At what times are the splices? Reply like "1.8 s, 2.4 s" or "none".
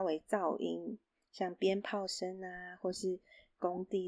none